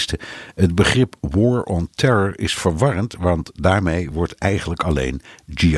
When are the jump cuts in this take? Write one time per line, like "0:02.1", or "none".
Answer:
none